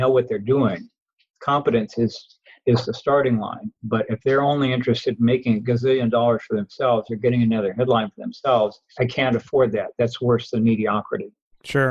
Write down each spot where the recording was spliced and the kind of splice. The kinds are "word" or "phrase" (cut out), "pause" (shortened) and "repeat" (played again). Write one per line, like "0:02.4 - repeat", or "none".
0:03.8 - pause

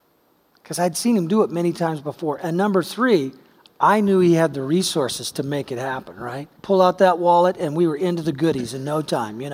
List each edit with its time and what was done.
0:06.6 - pause

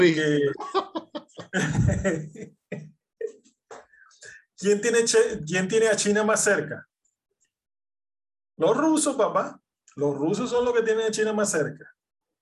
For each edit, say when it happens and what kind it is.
none

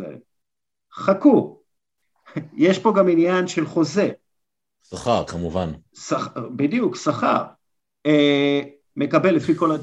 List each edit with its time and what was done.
0:05.9 - pause
0:08.9 - word

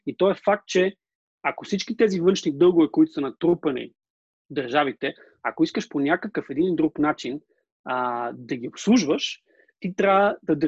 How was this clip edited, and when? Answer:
0:01.1 - pause

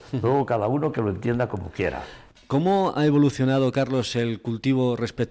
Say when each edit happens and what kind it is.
none

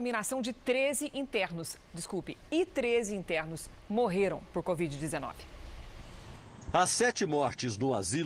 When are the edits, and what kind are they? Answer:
none

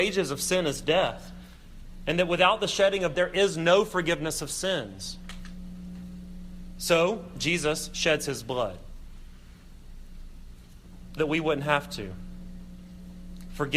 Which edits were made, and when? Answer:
0:03.2 - word
0:11.2 - word

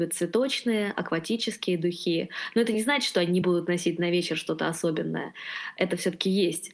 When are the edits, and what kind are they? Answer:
none

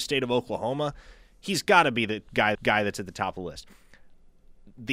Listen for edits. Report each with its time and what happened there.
0:02.5 - repeat

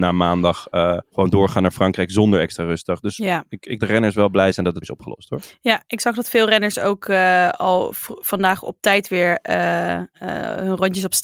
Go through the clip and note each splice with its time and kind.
0:01.1 - pause
0:03.8 - phrase
0:04.8 - word

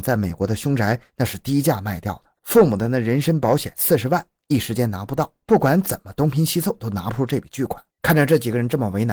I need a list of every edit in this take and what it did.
0:02.4 - pause
0:05.4 - pause
0:07.9 - pause

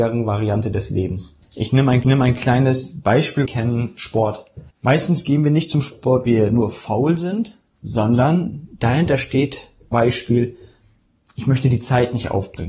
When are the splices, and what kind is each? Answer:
0:01.4 - pause
0:02.0 - repeat
0:03.5 - phrase
0:04.7 - pause
0:06.3 - word
0:09.9 - word

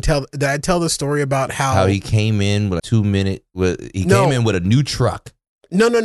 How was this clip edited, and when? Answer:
0:02.8 - word

